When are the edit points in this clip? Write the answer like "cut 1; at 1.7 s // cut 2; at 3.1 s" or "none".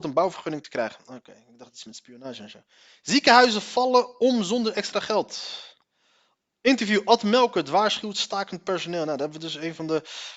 none